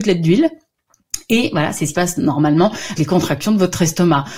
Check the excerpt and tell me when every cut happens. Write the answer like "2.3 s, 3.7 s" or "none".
1.9 s, 3.0 s